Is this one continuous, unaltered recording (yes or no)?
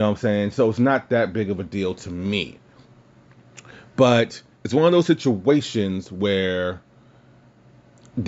yes